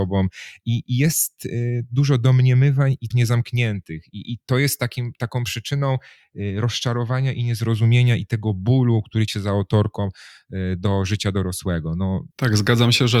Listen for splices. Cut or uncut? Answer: cut